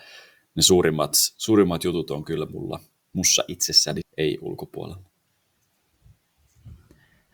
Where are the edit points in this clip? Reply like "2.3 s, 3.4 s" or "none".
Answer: 4.0 s

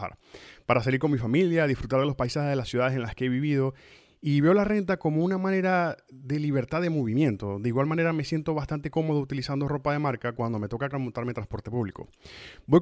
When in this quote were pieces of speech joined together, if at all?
10.9 s

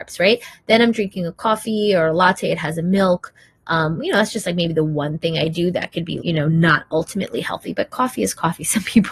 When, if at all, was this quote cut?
6.2 s

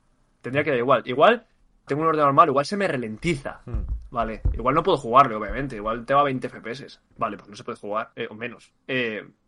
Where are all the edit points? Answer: 1.9 s, 7.1 s, 8.1 s

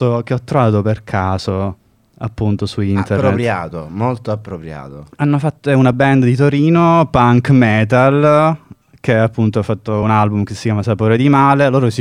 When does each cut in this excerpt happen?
none

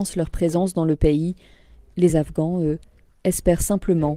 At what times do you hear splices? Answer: none

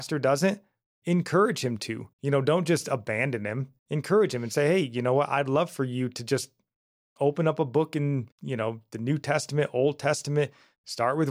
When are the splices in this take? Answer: 2.1 s, 3.8 s, 8.3 s

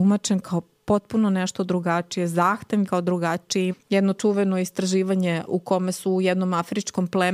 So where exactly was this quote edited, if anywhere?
2.8 s, 3.7 s, 4.1 s, 5.5 s

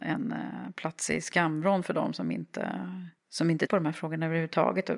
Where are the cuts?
3.2 s, 3.7 s

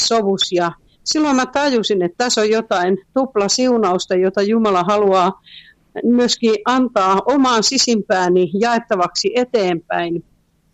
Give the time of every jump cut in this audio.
none

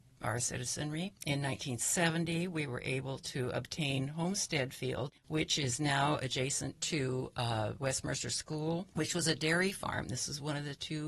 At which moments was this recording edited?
1.2 s, 5.2 s, 8.9 s

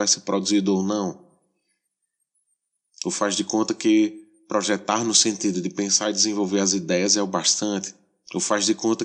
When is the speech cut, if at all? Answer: none

